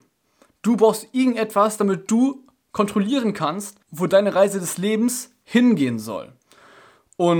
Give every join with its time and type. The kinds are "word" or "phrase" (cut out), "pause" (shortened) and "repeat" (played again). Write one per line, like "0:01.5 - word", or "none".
0:03.8 - pause